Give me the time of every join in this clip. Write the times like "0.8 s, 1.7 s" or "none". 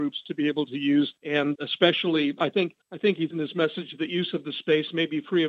1.2 s, 1.5 s, 2.8 s, 3.3 s